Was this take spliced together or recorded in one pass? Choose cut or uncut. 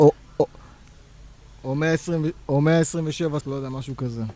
cut